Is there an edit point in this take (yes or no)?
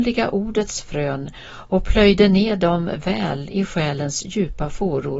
no